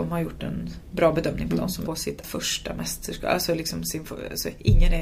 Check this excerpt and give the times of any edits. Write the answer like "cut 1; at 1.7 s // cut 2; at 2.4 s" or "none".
cut 1; at 1.9 s // cut 2; at 2.2 s